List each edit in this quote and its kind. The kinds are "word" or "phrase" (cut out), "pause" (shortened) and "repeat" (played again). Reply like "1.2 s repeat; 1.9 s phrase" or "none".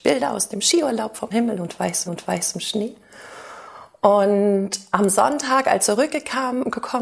1.3 s word; 2.1 s repeat; 5.8 s word